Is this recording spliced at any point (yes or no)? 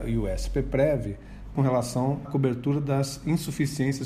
yes